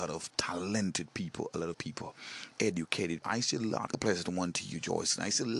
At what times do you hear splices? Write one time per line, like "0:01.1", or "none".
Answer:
0:01.7
0:03.2
0:03.9